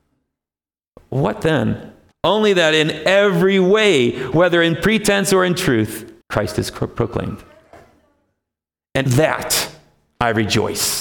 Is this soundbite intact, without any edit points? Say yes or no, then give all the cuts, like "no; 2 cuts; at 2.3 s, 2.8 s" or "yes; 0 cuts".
no; 3 cuts; at 2.1 s, 6.2 s, 9.1 s